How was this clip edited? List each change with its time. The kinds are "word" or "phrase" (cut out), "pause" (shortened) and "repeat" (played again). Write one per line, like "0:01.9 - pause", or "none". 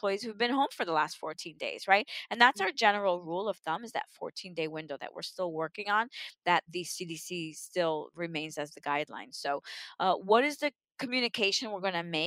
none